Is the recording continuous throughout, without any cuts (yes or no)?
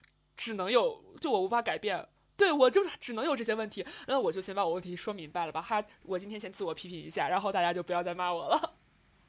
yes